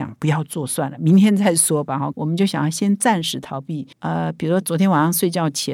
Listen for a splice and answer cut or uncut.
cut